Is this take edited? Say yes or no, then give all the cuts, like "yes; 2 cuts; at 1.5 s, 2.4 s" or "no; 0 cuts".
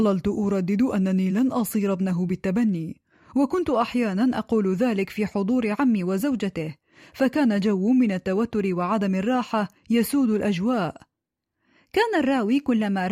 no; 0 cuts